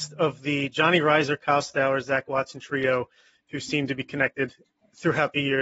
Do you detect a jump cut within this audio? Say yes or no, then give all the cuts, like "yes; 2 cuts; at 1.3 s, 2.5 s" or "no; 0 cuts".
no; 0 cuts